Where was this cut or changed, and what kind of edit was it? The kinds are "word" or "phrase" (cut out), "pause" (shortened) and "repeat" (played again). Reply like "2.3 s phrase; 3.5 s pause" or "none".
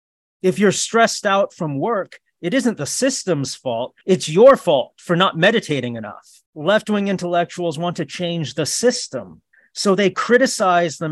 4.0 s pause; 6.5 s pause; 9.5 s pause